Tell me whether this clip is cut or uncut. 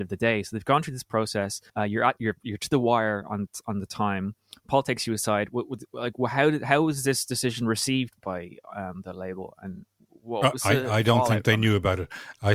cut